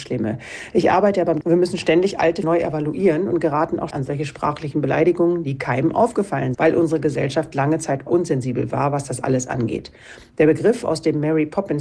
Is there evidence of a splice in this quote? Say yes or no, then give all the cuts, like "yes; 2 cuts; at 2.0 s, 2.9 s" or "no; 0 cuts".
yes; 5 cuts; at 1.4 s, 2.4 s, 3.9 s, 6.5 s, 8.1 s